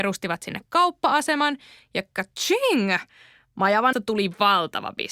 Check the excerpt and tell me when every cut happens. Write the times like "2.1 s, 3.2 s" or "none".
3.9 s